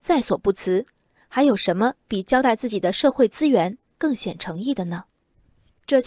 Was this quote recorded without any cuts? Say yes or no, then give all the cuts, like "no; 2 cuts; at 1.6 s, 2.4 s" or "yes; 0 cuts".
yes; 0 cuts